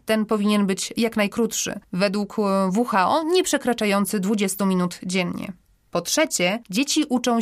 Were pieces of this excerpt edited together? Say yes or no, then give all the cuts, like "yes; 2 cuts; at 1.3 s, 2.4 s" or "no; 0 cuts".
no; 0 cuts